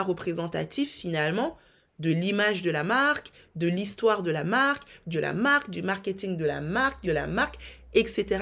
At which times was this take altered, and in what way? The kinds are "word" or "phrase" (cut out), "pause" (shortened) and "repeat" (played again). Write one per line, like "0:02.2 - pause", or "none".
0:05.1 - word
0:07.0 - word